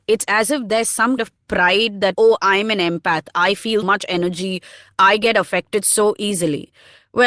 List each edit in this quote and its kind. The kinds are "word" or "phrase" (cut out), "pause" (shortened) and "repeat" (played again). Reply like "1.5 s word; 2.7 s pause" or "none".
1.2 s word; 2.1 s phrase; 3.8 s word